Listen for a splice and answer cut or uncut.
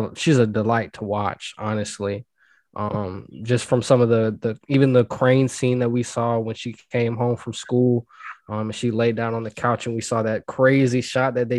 uncut